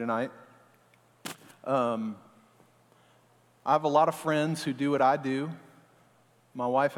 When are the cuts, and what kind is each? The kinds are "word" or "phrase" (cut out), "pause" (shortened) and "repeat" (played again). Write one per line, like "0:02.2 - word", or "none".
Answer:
none